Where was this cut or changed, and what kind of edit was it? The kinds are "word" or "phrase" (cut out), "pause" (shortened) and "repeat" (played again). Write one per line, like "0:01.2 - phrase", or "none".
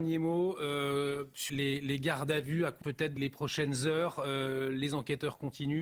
0:01.5 - word
0:02.8 - word
0:03.2 - word